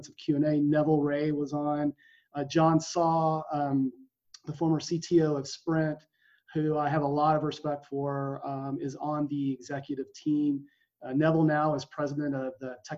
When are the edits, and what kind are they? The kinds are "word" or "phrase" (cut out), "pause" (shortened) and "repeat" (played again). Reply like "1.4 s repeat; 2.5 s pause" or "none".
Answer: none